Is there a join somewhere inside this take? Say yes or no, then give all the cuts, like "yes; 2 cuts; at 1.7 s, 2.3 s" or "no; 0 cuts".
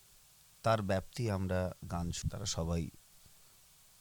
yes; 2 cuts; at 1.9 s, 2.2 s